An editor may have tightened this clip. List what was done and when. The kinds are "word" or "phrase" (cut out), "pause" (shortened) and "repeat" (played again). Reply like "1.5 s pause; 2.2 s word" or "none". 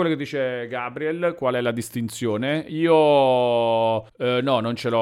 4.1 s pause